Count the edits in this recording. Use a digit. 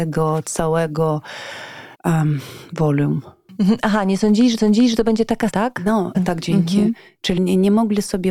5